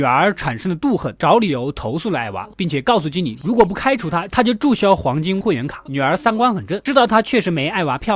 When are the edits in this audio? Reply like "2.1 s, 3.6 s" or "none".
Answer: 5.4 s